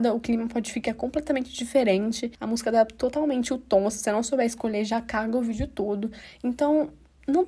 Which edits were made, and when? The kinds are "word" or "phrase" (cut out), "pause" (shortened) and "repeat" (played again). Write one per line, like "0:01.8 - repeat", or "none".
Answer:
none